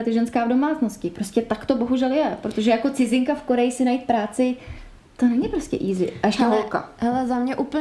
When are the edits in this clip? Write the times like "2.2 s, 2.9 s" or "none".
5.0 s

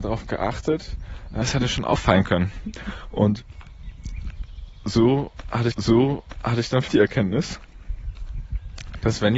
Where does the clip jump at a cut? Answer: 1.4 s, 5.7 s, 6.9 s

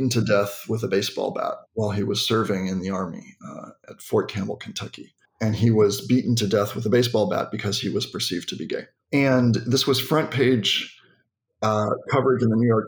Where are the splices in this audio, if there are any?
1.6 s, 5.2 s, 9.0 s

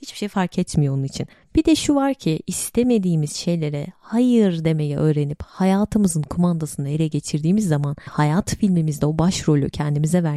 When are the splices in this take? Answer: 8.1 s

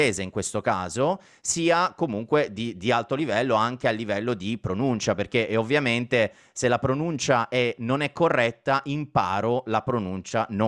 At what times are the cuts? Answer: none

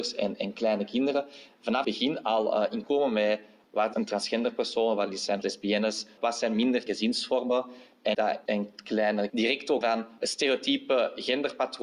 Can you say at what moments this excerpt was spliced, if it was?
1.8 s, 2.8 s, 3.9 s, 5.4 s, 6.9 s, 8.1 s, 8.5 s, 9.3 s, 9.8 s

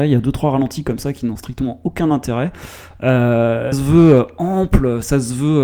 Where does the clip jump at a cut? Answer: 3.7 s

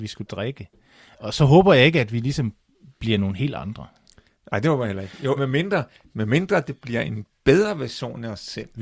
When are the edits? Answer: 5.4 s

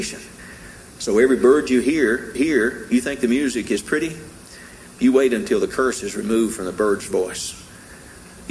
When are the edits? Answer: 2.3 s

